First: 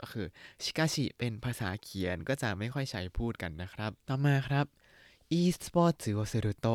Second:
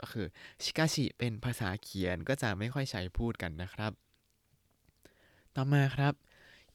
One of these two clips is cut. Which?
first; 1 cut; at 4.0 s

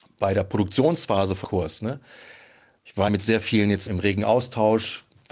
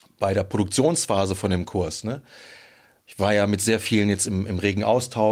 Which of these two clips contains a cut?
first; 3 cuts; at 1.4 s, 3.1 s, 3.9 s

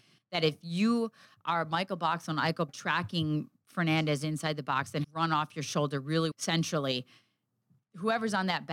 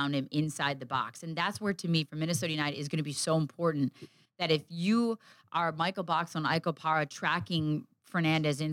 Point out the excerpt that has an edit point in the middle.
first; 3 cuts; at 2.7 s, 5.0 s, 6.3 s

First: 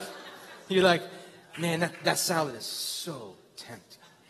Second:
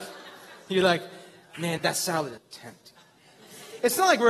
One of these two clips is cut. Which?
second; 2 cuts; at 1.8 s, 2.4 s

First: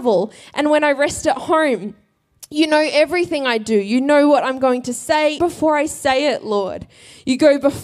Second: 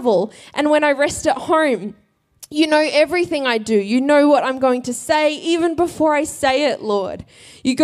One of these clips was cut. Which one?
first; 1 cut; at 5.4 s

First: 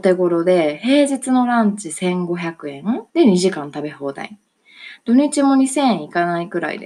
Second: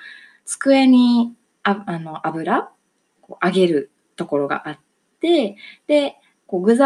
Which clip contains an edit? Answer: first; 1 cut; at 3.1 s

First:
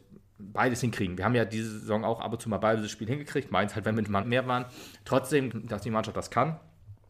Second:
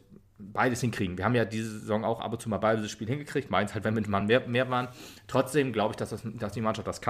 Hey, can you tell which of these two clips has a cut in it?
first; 2 cuts; at 4.2 s, 5.5 s

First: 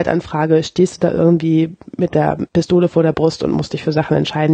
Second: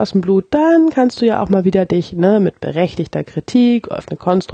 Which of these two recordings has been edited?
first; 1 cut; at 2.5 s

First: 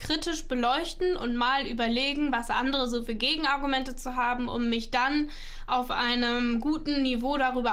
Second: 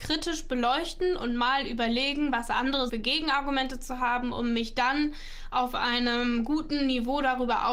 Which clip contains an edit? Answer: second; 1 cut; at 2.9 s

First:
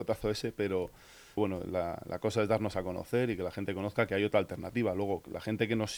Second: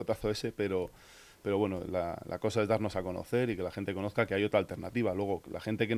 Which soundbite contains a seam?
first; 1 cut; at 1.4 s

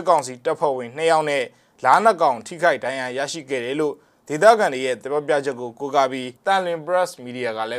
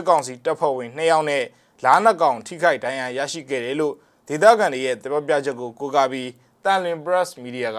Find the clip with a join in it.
first; 1 cut; at 6.4 s

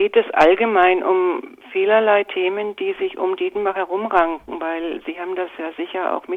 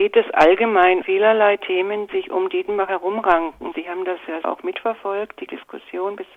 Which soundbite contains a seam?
second; 5 cuts; at 1.0 s, 2.1 s, 3.7 s, 4.4 s, 5.5 s

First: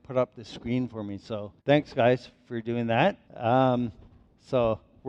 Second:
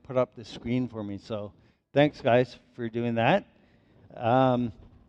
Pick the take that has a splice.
first; 2 cuts; at 1.6 s, 3.2 s

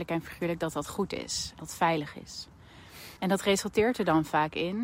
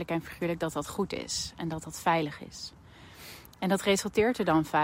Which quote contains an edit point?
first; 2 cuts; at 1.6 s, 3.2 s

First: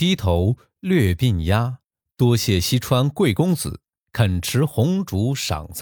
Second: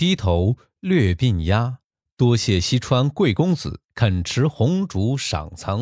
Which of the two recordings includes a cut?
second; 1 cut; at 3.9 s

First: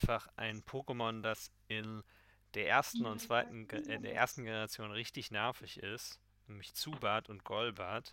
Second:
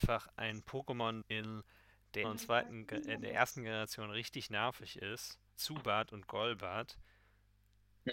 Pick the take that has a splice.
second; 3 cuts; at 1.2 s, 2.2 s, 5.6 s

